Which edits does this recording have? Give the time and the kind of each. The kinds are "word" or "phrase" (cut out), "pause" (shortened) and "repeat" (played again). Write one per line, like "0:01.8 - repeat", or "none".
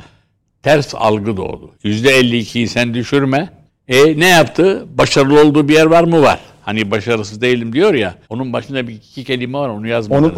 0:01.8 - pause
0:03.7 - pause
0:08.2 - pause